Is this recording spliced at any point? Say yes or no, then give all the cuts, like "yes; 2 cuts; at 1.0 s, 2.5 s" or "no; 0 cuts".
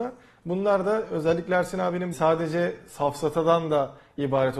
yes; 1 cut; at 2.1 s